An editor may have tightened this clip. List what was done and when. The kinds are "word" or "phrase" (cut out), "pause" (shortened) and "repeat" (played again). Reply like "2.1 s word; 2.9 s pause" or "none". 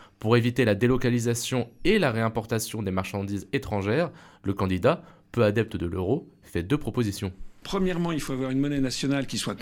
none

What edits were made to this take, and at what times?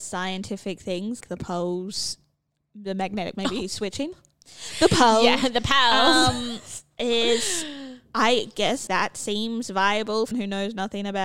1.2 s word; 3.3 s word; 8.9 s word; 10.3 s word

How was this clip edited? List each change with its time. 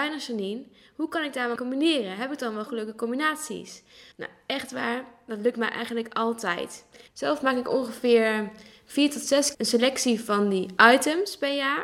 1.6 s word; 2.7 s word; 4.1 s pause; 7.1 s pause; 9.5 s word

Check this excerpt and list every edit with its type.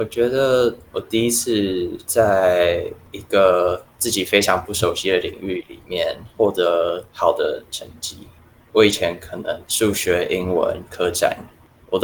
none

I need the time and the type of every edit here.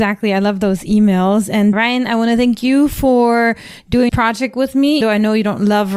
1.7 s word; 4.1 s word; 5.0 s word

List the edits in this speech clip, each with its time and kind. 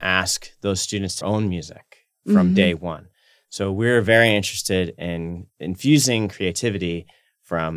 1.2 s phrase

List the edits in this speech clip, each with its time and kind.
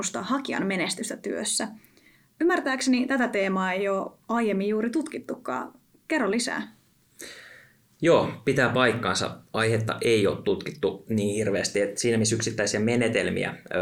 none

